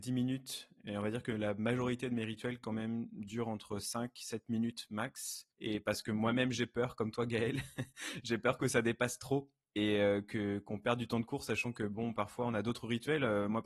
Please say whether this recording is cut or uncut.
cut